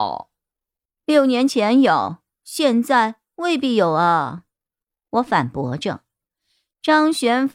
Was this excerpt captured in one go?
yes; 0 cuts

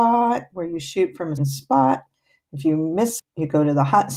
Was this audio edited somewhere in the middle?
yes; 2 cuts; at 1.4 s, 3.2 s

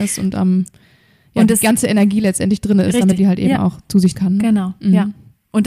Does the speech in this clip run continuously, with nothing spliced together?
no; 2 cuts; at 3.2 s, 4.1 s

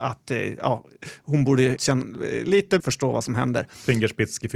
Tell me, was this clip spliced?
yes; 2 cuts; at 1.8 s, 2.8 s

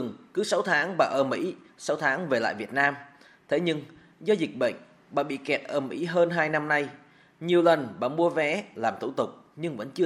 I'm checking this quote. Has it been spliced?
no; 0 cuts

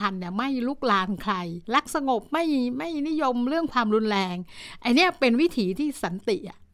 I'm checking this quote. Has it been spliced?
yes; 1 cut; at 1.6 s

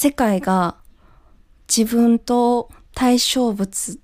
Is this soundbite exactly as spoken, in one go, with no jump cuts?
yes; 0 cuts

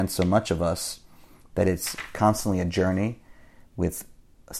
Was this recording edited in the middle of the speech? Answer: no; 0 cuts

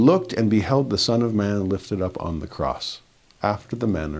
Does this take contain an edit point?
no; 0 cuts

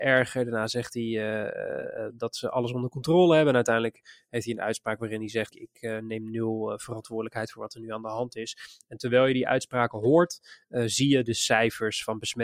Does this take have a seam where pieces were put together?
yes; 1 cut; at 5.5 s

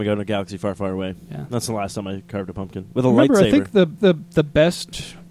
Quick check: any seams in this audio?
yes; 1 cut; at 4.0 s

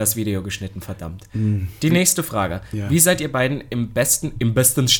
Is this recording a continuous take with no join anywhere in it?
yes; 0 cuts

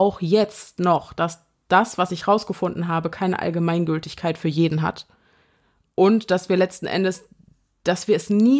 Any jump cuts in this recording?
no; 0 cuts

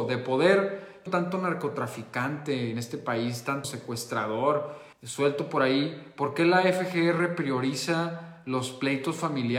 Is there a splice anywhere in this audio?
yes; 3 cuts; at 1.1 s, 3.6 s, 4.9 s

